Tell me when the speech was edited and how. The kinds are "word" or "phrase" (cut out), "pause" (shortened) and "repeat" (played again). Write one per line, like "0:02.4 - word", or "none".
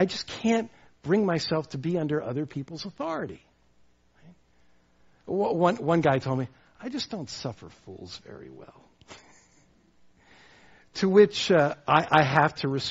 none